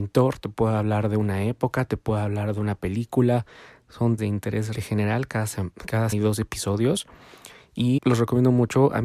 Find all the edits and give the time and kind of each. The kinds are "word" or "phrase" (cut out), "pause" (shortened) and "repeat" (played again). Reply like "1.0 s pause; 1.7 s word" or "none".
4.2 s word; 4.7 s word; 6.1 s word; 8.0 s word